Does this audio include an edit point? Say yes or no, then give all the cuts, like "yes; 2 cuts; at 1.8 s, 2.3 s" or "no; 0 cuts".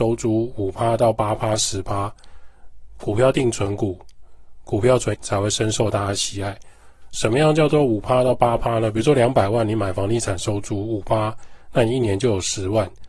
yes; 1 cut; at 5.1 s